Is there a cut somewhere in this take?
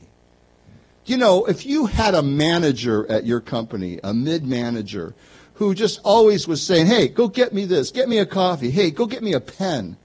no; 0 cuts

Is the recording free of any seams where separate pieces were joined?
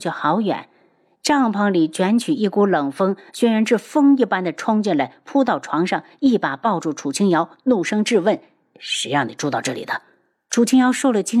yes; 0 cuts

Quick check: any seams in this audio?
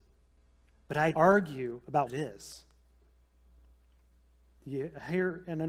yes; 2 cuts; at 1.1 s, 2.1 s

